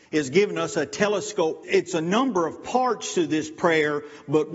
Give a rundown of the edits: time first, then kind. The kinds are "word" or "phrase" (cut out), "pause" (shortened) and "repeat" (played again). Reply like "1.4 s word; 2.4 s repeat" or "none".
1.6 s phrase